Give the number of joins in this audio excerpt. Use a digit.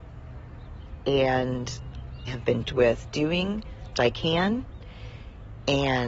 3